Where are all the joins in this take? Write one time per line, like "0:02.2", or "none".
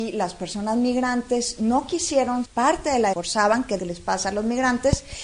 0:02.4
0:03.1
0:03.8